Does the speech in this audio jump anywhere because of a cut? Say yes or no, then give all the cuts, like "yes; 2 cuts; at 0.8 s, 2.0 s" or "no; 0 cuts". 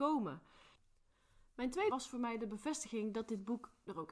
yes; 1 cut; at 1.9 s